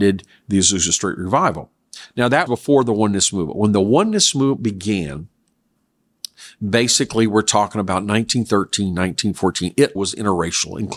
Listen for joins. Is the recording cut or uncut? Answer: cut